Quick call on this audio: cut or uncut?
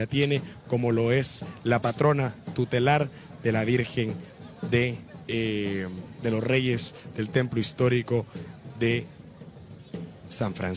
uncut